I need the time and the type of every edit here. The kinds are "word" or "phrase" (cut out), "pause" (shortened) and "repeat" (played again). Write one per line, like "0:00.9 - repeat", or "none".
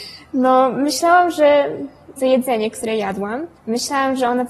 0:02.2 - word
0:03.6 - pause